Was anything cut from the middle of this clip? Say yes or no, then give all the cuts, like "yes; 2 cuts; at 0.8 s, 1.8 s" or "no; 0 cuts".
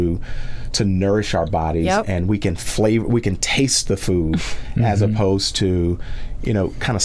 no; 0 cuts